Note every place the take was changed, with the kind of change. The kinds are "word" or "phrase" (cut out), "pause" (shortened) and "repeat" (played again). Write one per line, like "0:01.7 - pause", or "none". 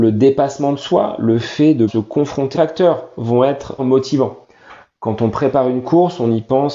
0:01.9 - word
0:02.5 - phrase
0:03.8 - phrase